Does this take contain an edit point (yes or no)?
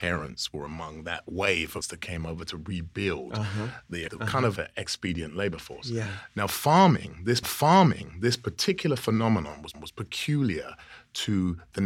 yes